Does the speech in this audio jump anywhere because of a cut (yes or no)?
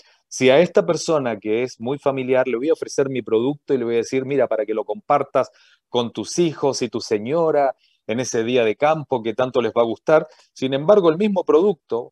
no